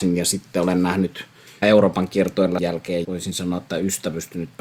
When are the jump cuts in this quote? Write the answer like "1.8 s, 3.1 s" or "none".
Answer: 1.6 s, 2.6 s, 3.0 s